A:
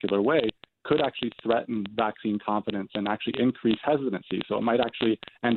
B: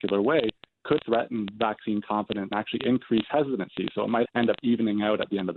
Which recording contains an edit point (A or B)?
B